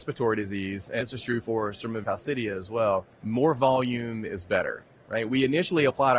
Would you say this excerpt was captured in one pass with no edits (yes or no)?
no